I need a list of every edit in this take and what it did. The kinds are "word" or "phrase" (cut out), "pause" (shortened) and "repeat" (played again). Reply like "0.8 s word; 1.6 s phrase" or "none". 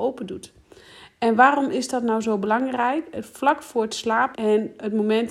4.3 s word